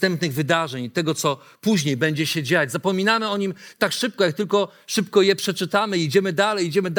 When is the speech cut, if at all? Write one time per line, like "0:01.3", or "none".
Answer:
none